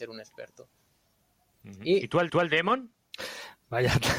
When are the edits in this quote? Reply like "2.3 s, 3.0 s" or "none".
2.3 s